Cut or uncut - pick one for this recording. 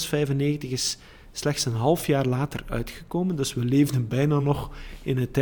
uncut